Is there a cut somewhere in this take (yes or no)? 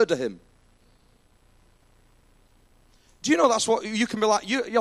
no